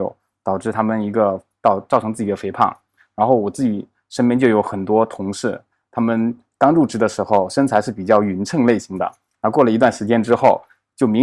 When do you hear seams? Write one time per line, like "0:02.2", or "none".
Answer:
none

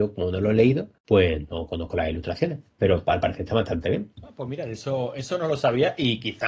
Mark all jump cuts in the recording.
0:01.0
0:04.1

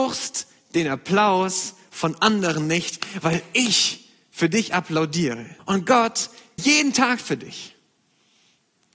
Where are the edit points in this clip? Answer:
0:05.6
0:06.6

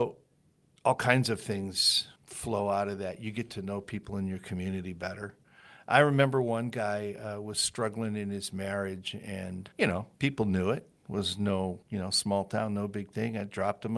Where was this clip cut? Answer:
0:02.2
0:09.7
0:10.1
0:11.0
0:11.8

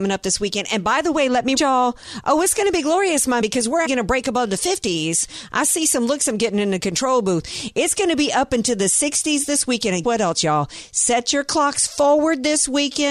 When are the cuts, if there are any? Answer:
0:01.6
0:03.4
0:03.9
0:10.0

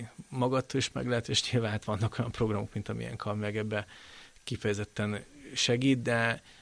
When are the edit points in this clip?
none

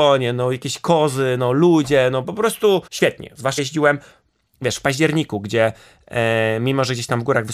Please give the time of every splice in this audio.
0:02.9
0:03.6

